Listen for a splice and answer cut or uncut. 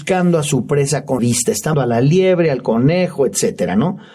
cut